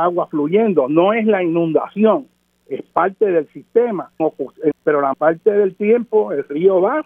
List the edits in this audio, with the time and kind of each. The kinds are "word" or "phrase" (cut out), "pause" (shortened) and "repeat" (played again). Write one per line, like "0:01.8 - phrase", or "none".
0:04.2 - word
0:04.7 - word
0:05.1 - word